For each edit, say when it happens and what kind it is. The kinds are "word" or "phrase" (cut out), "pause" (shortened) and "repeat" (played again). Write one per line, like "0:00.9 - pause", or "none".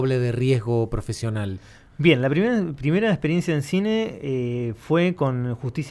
none